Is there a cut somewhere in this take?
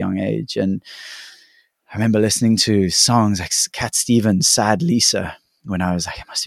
yes; 1 cut; at 3.7 s

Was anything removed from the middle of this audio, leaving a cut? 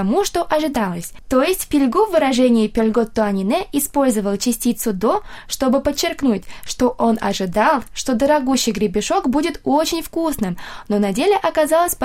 no; 0 cuts

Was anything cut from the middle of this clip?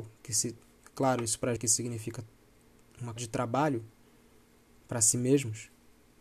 yes; 2 cuts; at 1.6 s, 3.2 s

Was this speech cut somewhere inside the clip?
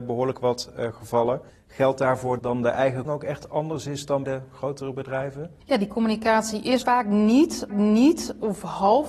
yes; 7 cuts; at 1.5 s, 2.4 s, 3.0 s, 4.2 s, 5.6 s, 6.8 s, 7.7 s

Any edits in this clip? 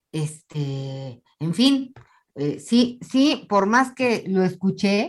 no; 0 cuts

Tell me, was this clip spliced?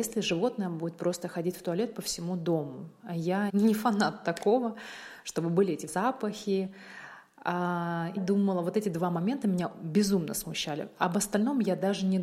yes; 3 cuts; at 3.5 s, 5.9 s, 8.2 s

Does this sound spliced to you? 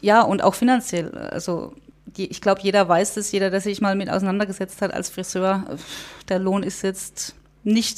no; 0 cuts

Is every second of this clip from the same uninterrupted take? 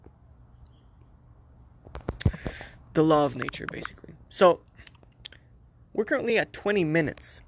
yes; 0 cuts

